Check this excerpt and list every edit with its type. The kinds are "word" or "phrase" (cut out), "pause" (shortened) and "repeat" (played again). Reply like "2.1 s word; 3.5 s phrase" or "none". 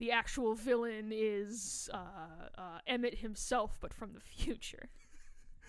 none